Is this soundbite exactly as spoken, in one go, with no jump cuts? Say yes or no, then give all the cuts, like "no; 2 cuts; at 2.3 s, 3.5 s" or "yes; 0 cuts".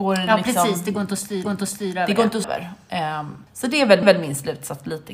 no; 4 cuts; at 1.4 s, 2.4 s, 3.5 s, 4.0 s